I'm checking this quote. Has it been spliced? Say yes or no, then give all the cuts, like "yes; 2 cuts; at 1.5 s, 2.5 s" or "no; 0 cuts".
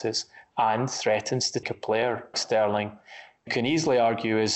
yes; 3 cuts; at 1.6 s, 2.3 s, 3.5 s